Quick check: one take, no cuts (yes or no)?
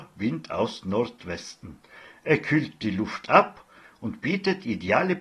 yes